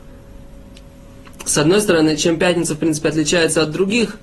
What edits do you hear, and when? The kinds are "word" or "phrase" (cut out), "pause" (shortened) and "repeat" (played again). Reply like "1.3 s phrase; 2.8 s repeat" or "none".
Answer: none